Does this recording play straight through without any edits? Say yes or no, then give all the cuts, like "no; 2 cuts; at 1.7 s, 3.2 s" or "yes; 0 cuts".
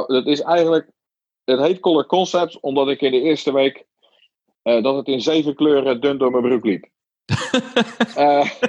yes; 0 cuts